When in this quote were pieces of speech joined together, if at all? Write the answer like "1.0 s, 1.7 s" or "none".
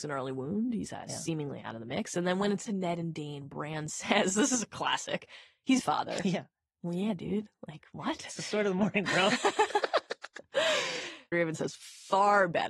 2.7 s, 5.8 s, 11.3 s